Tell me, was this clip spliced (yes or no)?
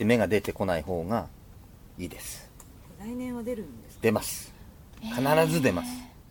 no